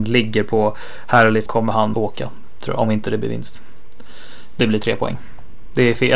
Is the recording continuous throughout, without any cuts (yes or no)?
no